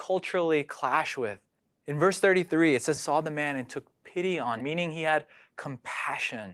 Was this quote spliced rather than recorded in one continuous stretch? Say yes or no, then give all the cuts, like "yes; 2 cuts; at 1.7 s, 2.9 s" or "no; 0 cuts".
yes; 3 cuts; at 1.6 s, 3.0 s, 4.6 s